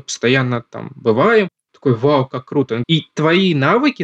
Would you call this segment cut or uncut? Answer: cut